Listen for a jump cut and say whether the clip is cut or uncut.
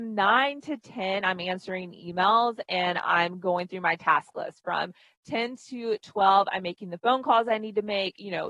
uncut